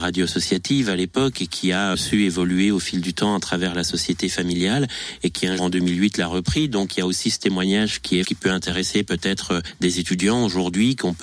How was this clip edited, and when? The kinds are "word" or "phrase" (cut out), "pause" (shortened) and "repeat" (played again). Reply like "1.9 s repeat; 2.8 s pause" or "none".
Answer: 5.6 s word; 8.2 s word